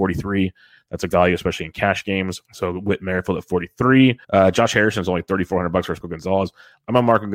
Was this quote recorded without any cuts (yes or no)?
no